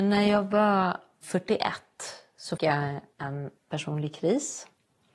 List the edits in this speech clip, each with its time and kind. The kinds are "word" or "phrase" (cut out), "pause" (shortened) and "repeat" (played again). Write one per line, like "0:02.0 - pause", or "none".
0:02.6 - word
0:03.6 - word